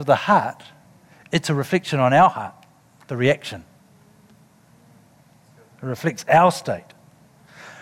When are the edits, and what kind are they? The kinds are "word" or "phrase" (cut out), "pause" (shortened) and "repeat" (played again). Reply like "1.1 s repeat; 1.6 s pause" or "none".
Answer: none